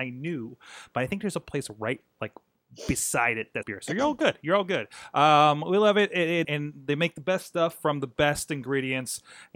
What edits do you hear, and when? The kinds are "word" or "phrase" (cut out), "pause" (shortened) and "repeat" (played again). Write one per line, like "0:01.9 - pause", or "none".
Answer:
0:03.6 - word
0:06.4 - word